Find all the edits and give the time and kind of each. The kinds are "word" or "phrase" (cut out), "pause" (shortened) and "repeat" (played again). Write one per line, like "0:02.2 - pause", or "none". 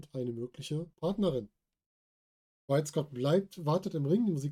0:00.9 - pause